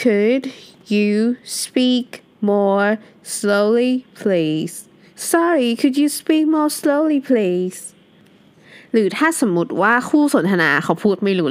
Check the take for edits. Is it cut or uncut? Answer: uncut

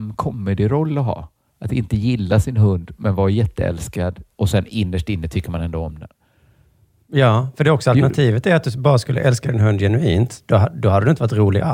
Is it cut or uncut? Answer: uncut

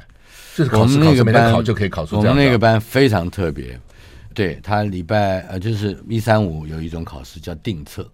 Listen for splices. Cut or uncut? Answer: cut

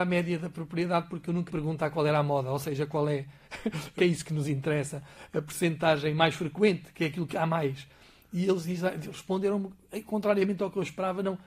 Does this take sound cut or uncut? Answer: cut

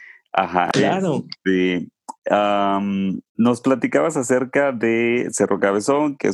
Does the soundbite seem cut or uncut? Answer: cut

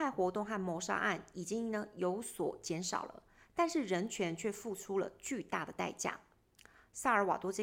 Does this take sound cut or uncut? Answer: uncut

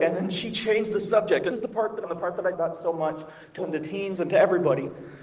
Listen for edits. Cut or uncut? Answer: cut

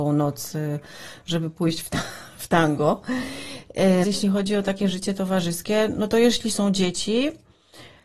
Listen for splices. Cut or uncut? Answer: cut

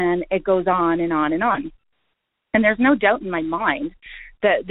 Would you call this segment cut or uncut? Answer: uncut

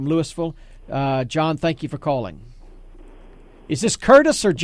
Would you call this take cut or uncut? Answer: uncut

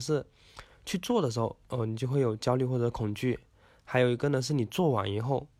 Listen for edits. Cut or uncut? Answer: uncut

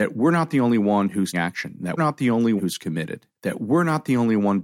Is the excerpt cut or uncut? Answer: cut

